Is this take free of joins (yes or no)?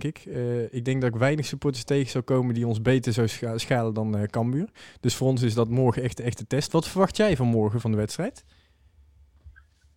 yes